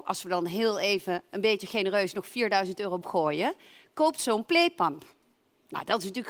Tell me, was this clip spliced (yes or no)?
yes